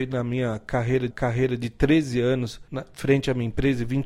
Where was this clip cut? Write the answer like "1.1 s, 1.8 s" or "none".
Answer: 1.1 s, 2.7 s